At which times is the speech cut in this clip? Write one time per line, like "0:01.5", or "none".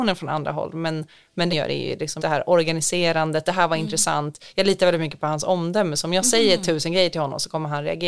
0:01.5
0:02.2
0:03.4